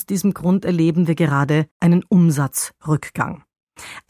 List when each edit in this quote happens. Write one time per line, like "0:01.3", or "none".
0:01.7

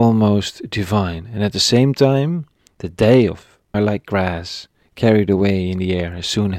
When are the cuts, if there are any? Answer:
0:03.7

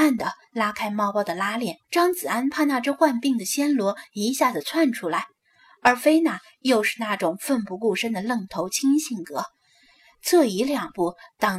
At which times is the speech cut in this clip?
0:01.8

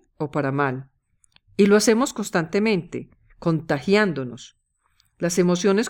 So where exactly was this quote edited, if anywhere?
0:03.3

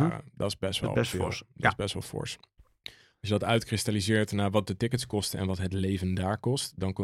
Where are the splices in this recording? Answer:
0:02.6

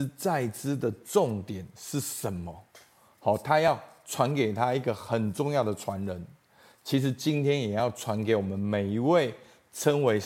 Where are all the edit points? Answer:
none

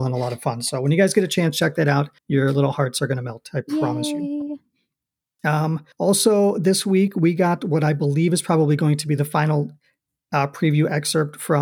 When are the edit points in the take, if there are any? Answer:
0:02.2
0:05.9

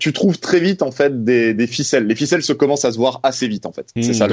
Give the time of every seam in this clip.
none

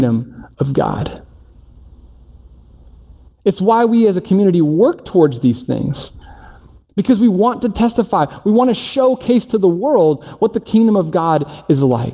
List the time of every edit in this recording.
none

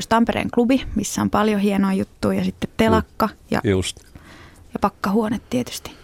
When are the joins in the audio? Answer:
0:03.4

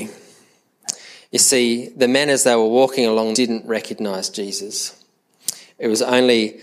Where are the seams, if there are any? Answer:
0:03.3

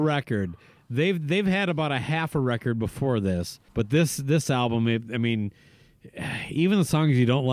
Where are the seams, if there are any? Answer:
0:03.7

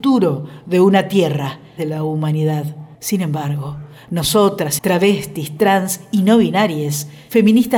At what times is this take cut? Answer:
0:01.8
0:02.9
0:04.8

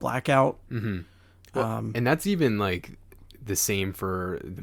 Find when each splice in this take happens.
none

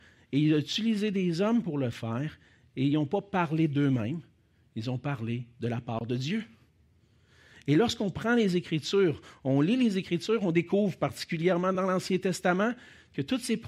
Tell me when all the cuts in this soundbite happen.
none

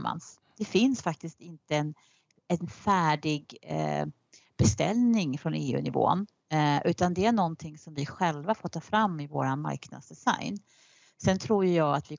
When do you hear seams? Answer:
none

